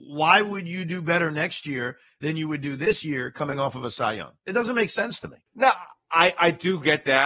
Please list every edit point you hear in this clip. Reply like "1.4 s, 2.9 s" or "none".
5.5 s